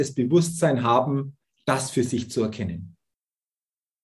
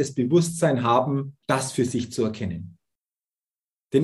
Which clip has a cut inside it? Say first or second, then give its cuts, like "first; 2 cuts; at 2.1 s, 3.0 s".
second; 1 cut; at 1.4 s